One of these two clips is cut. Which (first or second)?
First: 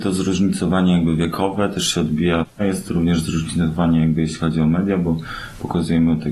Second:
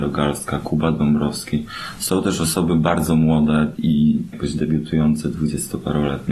second